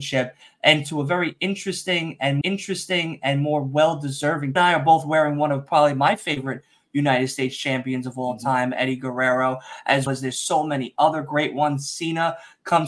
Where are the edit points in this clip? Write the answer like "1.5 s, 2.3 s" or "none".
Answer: 2.4 s, 4.6 s, 10.1 s